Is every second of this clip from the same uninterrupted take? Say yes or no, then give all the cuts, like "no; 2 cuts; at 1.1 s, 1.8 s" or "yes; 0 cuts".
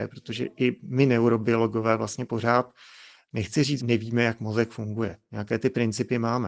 no; 1 cut; at 3.8 s